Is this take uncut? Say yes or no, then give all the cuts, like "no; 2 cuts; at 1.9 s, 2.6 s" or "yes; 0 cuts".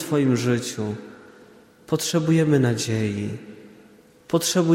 yes; 0 cuts